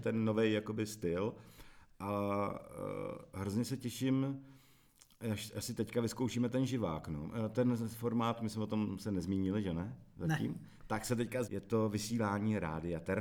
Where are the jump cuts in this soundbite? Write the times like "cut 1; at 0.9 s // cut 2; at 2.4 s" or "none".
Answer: cut 1; at 11.4 s